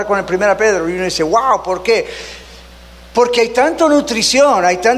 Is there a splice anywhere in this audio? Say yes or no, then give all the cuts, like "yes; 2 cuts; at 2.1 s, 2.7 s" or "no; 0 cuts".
no; 0 cuts